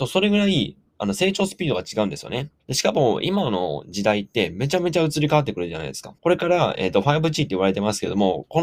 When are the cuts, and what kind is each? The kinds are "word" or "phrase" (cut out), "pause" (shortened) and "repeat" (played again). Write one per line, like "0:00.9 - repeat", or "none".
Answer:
0:02.6 - pause
0:06.2 - pause